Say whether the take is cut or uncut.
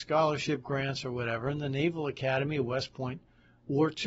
uncut